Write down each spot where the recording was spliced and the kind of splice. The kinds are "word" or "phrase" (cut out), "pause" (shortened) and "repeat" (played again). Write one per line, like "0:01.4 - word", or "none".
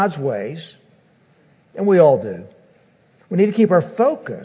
none

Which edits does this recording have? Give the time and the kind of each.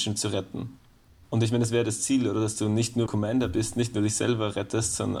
0:01.1 - pause
0:03.1 - phrase

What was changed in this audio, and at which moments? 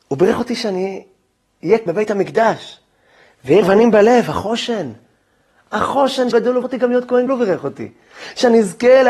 0:01.9 - word
0:03.6 - word
0:06.3 - word
0:06.6 - word
0:07.3 - word

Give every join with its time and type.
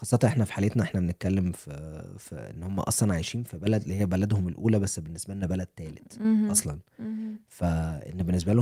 none

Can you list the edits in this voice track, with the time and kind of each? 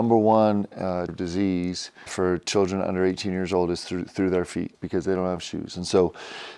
0:01.1 - word
0:02.1 - word
0:04.7 - word

